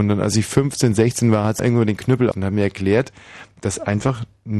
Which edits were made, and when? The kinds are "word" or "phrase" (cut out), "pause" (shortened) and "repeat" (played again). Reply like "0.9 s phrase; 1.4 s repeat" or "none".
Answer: 1.6 s word; 2.3 s word